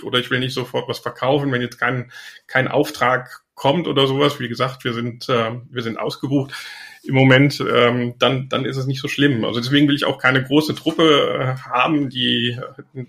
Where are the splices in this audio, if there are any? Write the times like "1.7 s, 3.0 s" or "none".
none